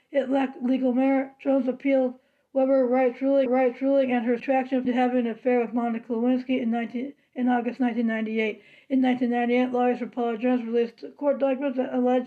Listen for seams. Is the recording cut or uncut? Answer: cut